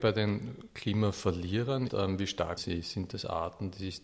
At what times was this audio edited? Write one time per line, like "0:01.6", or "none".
0:01.9
0:02.6